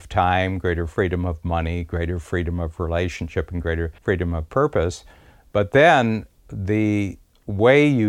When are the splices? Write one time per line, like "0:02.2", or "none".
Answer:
0:04.0